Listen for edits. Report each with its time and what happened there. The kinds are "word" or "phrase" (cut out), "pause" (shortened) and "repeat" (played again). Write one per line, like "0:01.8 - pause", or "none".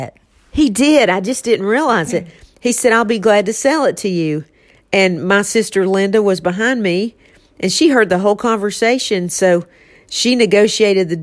none